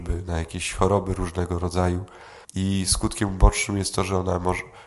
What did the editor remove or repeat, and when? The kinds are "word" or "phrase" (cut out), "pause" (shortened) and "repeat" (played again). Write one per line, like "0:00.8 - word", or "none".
0:02.4 - pause